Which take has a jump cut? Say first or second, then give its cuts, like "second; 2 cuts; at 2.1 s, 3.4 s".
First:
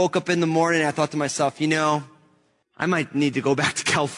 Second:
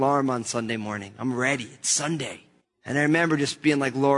second; 1 cut; at 2.6 s